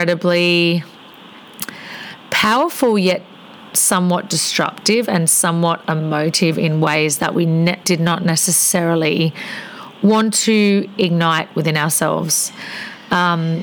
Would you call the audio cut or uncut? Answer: cut